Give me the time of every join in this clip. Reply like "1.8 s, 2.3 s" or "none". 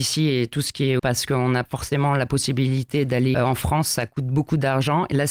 1.0 s, 1.7 s, 3.3 s